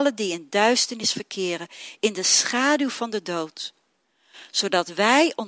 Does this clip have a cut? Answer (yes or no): no